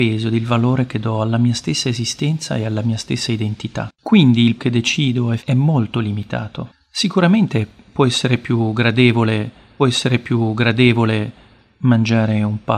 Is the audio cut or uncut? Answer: cut